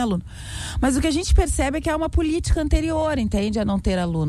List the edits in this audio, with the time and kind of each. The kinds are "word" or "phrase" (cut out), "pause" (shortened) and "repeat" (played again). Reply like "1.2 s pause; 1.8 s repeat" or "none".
none